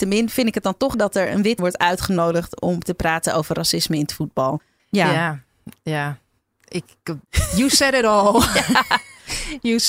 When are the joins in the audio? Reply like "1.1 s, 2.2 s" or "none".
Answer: 0.9 s, 1.6 s